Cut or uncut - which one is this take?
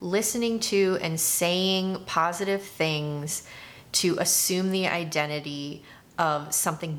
uncut